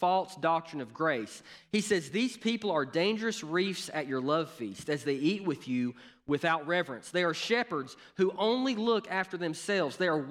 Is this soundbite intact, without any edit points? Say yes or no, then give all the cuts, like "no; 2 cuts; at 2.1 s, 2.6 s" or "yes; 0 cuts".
yes; 0 cuts